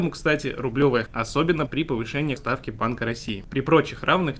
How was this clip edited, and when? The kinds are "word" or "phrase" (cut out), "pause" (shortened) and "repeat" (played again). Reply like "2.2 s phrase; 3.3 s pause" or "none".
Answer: 1.1 s word; 1.7 s word; 2.4 s word